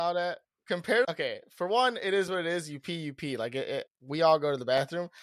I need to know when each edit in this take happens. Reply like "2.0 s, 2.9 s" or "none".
1.0 s, 3.9 s